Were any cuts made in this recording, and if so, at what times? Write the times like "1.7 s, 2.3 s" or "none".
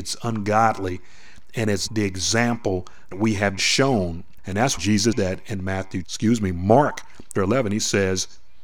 1.9 s, 3.1 s, 3.6 s, 4.4 s, 4.8 s, 5.1 s, 6.0 s, 7.4 s